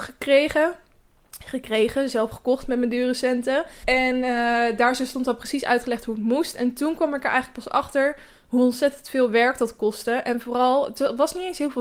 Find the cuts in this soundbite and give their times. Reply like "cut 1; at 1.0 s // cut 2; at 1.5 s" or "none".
cut 1; at 3.8 s